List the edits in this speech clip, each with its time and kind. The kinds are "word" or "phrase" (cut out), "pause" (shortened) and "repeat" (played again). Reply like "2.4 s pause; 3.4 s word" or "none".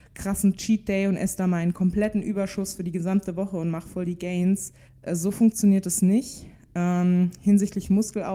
4.9 s pause